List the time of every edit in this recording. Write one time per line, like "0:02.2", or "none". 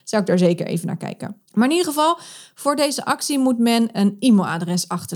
0:01.4